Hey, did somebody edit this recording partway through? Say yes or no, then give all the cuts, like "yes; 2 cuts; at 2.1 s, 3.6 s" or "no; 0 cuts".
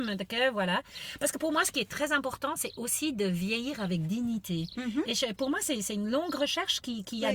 no; 0 cuts